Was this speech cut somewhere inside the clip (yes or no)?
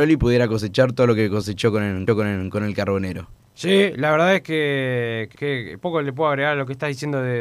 yes